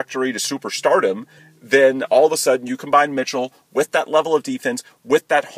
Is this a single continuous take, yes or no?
yes